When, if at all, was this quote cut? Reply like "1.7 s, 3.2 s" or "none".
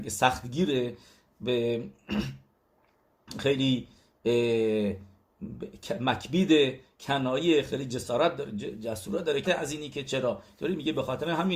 9.4 s